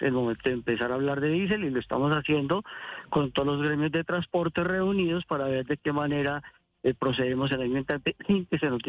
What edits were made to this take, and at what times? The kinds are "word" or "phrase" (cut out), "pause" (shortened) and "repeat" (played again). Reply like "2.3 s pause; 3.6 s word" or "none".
none

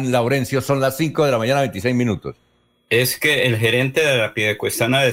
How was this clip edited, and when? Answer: none

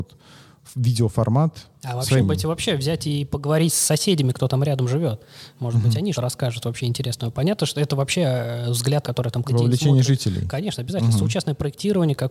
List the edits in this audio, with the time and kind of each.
2.2 s word; 6.1 s word; 9.0 s word; 9.4 s word

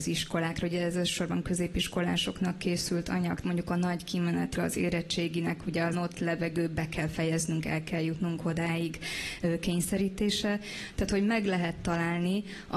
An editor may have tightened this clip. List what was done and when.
3.4 s word; 4.5 s word; 5.9 s word

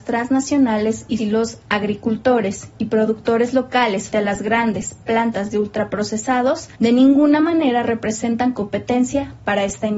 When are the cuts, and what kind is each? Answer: 1.2 s phrase; 4.1 s word; 6.7 s pause

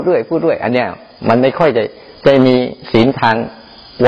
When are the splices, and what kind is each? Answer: none

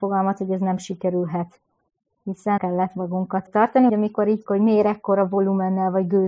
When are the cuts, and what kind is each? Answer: 2.6 s word; 3.5 s word; 3.9 s word; 4.5 s word

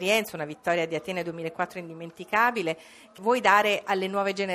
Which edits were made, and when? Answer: 3.2 s word

